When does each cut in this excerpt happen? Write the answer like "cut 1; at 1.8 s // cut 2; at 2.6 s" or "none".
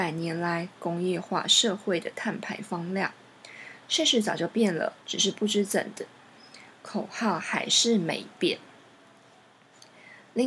cut 1; at 5.0 s